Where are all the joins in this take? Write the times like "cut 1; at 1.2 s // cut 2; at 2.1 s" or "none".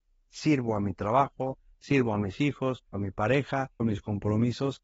cut 1; at 2.9 s // cut 2; at 3.8 s